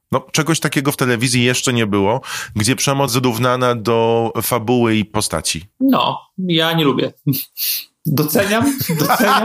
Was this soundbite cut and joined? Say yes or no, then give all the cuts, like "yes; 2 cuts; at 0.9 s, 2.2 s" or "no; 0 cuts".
yes; 2 cuts; at 3.1 s, 5.7 s